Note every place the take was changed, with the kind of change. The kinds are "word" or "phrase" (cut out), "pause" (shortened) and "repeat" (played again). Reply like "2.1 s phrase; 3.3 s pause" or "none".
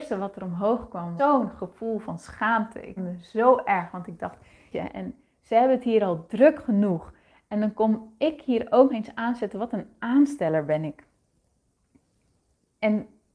1.2 s word; 3.0 s word; 4.7 s word; 8.9 s word